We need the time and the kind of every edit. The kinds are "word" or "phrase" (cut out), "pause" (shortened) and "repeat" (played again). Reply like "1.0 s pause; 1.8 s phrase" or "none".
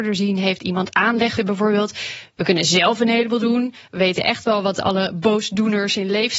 1.4 s phrase